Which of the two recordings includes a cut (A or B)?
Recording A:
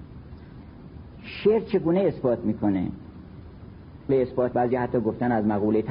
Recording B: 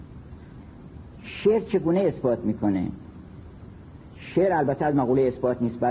A